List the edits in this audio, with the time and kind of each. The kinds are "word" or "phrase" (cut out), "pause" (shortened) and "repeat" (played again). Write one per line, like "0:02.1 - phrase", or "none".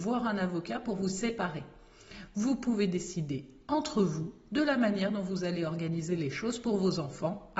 none